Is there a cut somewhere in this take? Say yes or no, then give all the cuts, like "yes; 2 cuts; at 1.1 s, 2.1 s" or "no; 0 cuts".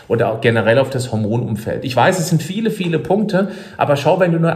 no; 0 cuts